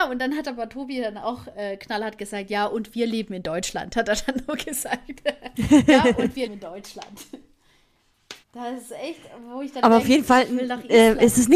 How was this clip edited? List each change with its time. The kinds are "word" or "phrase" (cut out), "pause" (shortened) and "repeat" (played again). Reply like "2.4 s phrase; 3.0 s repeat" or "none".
6.5 s word; 8.4 s pause